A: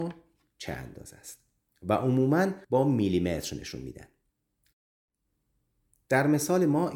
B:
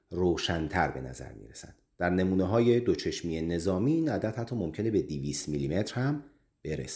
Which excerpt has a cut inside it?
A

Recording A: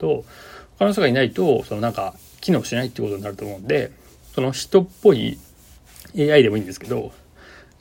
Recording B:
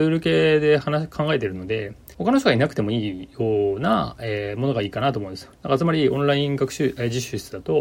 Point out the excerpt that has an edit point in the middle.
B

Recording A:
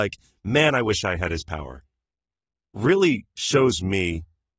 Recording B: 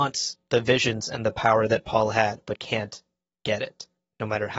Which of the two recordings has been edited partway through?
B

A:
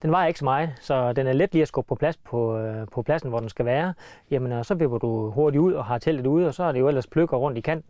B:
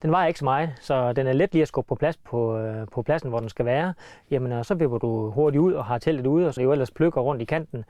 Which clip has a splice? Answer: B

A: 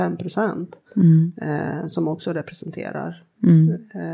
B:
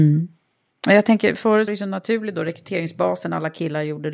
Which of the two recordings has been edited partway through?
B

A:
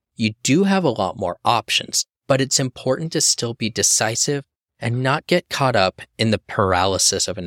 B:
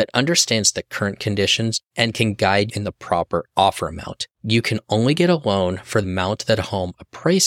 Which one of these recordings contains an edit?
B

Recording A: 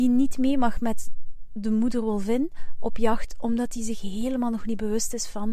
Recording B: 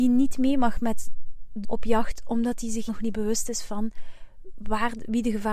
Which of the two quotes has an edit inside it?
B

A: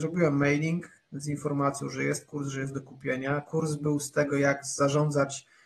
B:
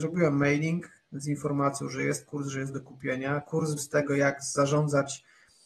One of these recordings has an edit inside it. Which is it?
B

